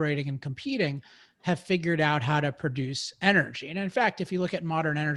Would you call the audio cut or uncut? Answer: uncut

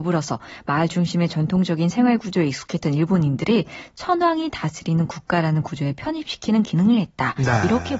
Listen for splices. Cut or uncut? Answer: uncut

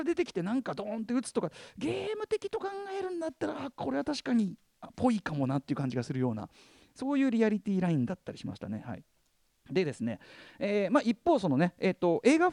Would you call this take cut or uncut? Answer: uncut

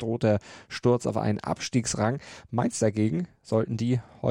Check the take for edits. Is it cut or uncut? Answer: uncut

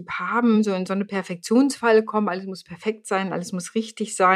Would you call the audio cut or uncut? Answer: uncut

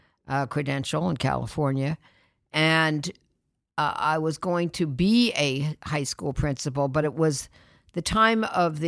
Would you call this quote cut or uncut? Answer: uncut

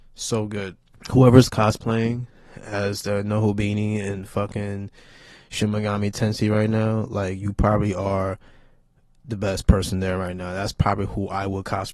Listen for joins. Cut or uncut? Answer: uncut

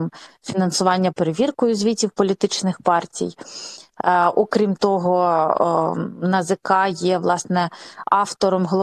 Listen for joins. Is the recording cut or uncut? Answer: cut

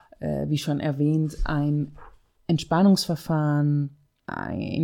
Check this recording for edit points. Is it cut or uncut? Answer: uncut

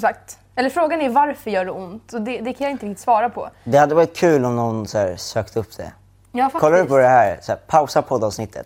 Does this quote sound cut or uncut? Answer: uncut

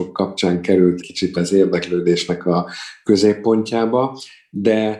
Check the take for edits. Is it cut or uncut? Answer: cut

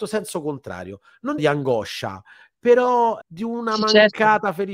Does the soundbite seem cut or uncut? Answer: cut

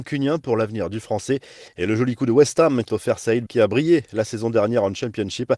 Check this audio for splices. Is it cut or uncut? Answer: cut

